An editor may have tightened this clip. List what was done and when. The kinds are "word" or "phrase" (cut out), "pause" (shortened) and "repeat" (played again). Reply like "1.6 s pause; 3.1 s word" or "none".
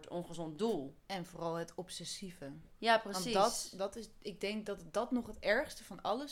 none